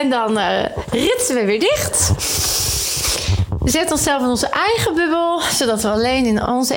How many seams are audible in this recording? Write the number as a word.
zero